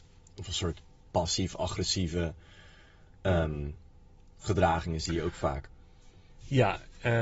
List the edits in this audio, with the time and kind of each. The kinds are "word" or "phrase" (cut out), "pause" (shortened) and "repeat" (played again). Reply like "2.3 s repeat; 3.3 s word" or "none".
none